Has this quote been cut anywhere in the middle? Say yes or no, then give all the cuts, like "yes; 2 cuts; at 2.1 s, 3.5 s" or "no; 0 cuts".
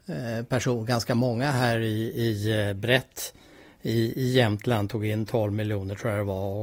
no; 0 cuts